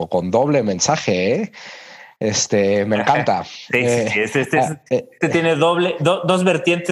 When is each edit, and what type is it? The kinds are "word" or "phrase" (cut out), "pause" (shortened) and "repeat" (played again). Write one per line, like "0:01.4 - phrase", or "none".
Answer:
0:04.9 - pause